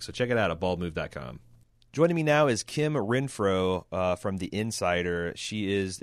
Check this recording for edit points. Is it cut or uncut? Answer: uncut